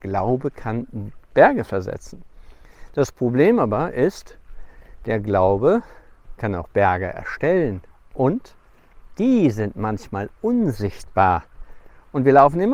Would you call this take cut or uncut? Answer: uncut